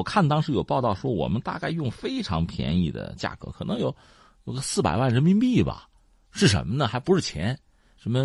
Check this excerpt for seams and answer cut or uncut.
uncut